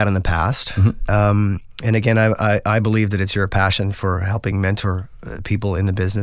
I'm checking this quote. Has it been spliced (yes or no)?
no